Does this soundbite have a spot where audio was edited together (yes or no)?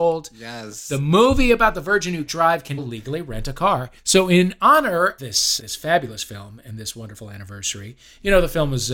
yes